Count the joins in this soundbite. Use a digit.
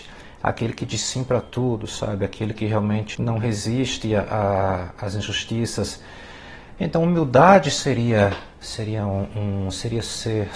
1